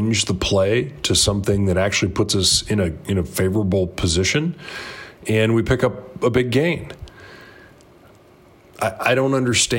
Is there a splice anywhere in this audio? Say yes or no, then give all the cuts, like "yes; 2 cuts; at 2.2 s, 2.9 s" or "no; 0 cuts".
no; 0 cuts